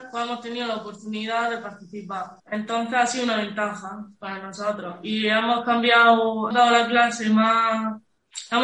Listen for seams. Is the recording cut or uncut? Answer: cut